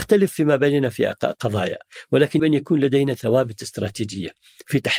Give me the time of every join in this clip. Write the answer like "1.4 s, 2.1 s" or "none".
2.4 s